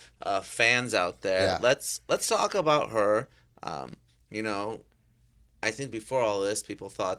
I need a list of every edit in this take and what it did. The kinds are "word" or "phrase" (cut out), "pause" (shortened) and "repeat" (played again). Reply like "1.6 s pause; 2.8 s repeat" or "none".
none